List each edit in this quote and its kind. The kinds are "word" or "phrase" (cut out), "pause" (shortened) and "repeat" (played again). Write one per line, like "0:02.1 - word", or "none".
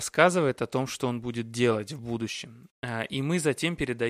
none